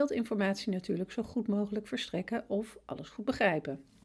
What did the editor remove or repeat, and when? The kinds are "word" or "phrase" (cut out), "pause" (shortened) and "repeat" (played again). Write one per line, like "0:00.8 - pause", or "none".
none